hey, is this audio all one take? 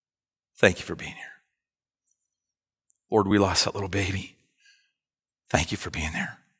yes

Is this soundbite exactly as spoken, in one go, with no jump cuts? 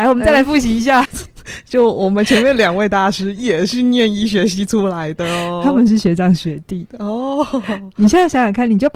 no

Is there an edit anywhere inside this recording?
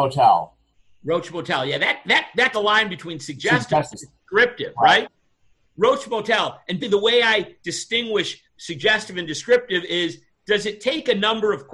yes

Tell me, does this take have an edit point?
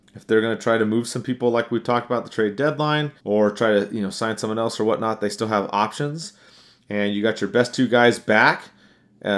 yes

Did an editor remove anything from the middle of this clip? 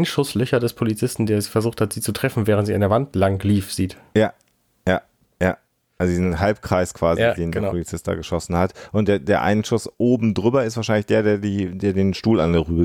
no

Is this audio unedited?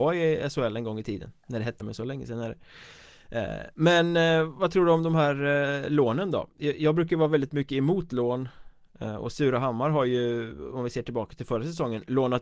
no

